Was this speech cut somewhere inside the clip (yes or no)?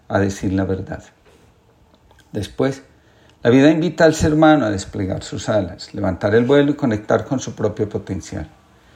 no